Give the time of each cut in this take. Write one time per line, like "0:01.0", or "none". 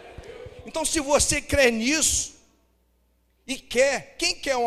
none